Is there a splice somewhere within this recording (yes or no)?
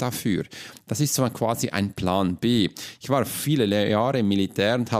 no